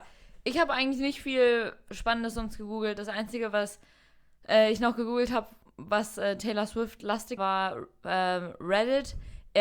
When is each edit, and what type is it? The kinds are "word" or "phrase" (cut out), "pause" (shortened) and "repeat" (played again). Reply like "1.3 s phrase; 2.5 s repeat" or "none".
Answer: 7.4 s word